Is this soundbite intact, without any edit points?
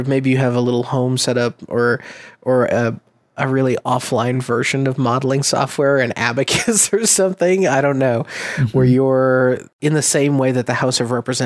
yes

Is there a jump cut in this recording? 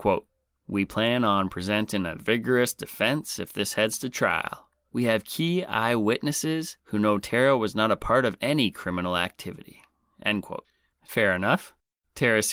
no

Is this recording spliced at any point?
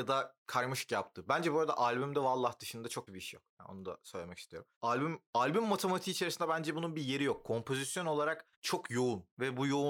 yes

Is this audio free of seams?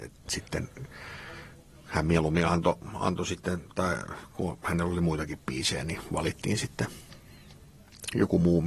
yes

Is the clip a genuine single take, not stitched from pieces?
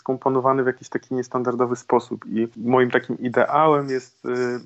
yes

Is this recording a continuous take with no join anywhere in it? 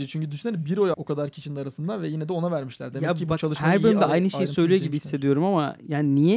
no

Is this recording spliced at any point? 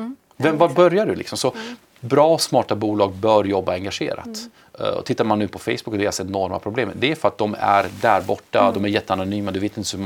no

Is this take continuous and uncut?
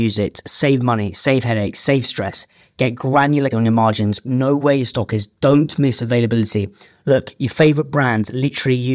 no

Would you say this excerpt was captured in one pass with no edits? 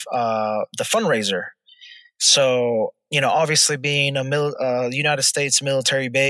yes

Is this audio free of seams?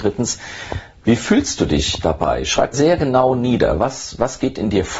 no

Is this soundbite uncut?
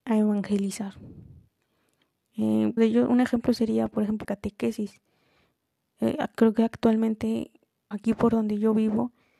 no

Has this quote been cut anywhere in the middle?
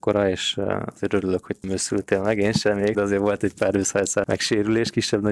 yes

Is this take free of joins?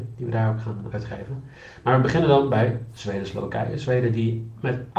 no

